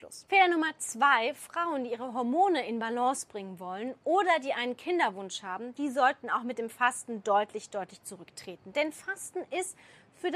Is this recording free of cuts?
yes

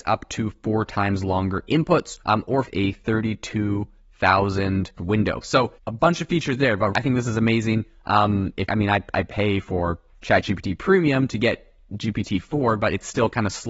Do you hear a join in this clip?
yes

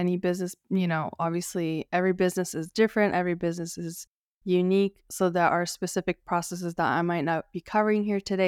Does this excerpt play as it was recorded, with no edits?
yes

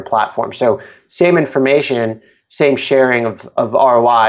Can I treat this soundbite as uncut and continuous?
yes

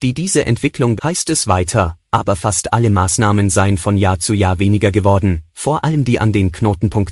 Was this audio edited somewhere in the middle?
yes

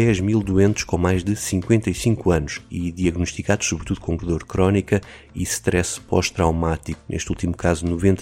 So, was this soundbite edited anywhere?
yes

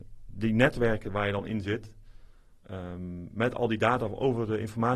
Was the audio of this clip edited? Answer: no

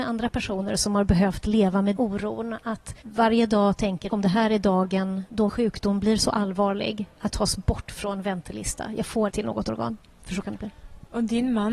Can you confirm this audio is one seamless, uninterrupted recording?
no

